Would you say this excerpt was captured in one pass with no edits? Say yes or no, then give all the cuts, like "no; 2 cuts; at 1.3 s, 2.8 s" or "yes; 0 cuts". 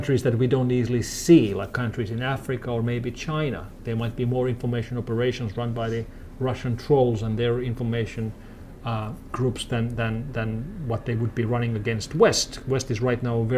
yes; 0 cuts